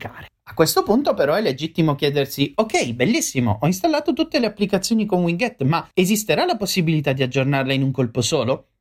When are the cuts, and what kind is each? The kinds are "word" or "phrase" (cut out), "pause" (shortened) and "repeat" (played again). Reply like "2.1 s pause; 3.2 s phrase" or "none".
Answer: 5.9 s pause